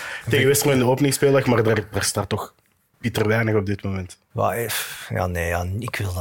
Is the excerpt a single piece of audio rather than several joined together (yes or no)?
yes